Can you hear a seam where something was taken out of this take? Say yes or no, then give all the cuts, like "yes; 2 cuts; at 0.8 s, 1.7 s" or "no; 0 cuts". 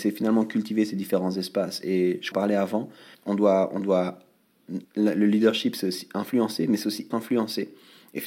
yes; 4 cuts; at 2.3 s, 3.1 s, 4.8 s, 7.1 s